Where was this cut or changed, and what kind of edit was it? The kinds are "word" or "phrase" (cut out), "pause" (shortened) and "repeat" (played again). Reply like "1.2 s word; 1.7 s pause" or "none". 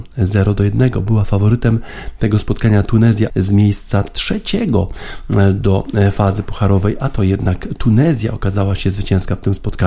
3.3 s word